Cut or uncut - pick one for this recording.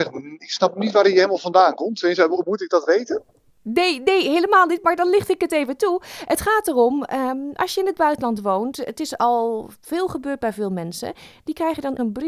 uncut